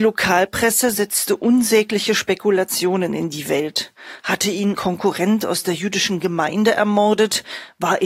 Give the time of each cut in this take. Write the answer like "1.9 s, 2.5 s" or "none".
4.7 s